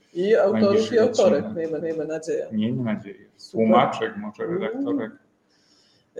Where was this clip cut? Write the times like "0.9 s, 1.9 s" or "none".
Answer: 1.8 s